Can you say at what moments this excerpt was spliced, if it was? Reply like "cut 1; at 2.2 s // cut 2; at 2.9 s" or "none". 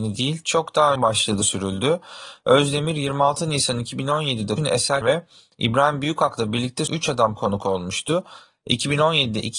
cut 1; at 1.0 s // cut 2; at 1.4 s // cut 3; at 4.6 s // cut 4; at 5.0 s // cut 5; at 6.9 s // cut 6; at 7.4 s